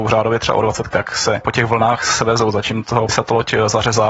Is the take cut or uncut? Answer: cut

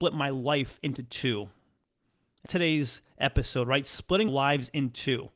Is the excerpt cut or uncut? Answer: cut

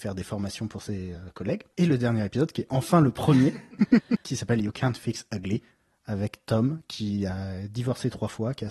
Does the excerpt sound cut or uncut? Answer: uncut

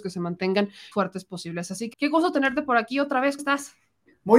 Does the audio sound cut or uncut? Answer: cut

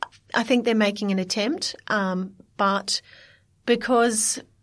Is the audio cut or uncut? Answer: uncut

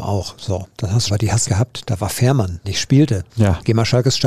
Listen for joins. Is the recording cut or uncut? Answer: cut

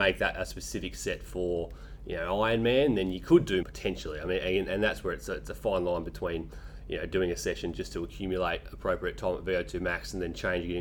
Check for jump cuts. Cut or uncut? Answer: cut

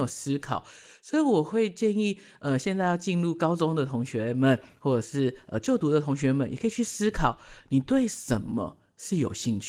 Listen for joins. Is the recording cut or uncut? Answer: uncut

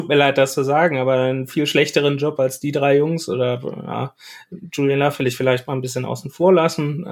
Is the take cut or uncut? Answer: uncut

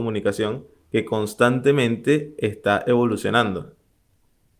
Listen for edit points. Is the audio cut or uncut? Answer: uncut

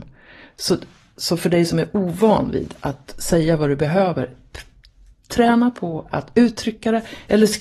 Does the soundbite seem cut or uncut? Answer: uncut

